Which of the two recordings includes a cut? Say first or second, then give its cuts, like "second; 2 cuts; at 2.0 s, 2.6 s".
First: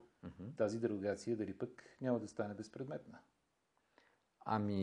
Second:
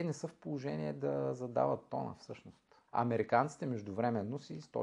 second; 1 cut; at 2.9 s